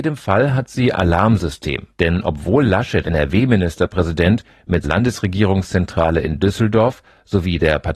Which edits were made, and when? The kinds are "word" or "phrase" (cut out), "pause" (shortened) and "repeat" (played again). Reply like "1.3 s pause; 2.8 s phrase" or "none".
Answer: 0.9 s word; 1.9 s pause; 3.0 s word; 4.8 s word